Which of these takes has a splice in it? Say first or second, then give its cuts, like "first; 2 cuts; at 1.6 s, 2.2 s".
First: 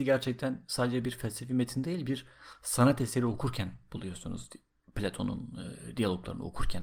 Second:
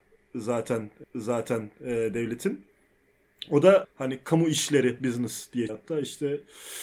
second; 4 cuts; at 1.0 s, 3.8 s, 5.0 s, 5.7 s